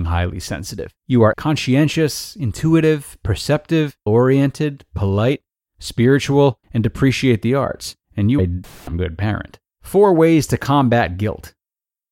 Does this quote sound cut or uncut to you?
cut